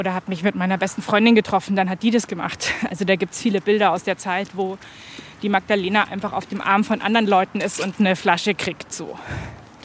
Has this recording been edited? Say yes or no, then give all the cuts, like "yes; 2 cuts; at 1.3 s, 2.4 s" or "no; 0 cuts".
no; 0 cuts